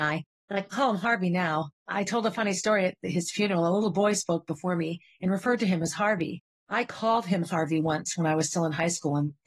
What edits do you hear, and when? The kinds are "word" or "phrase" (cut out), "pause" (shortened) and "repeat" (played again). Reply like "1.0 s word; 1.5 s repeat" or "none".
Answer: 1.8 s pause; 6.5 s pause